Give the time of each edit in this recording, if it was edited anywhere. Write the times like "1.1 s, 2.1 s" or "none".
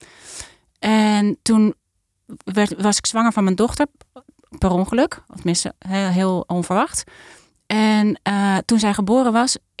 none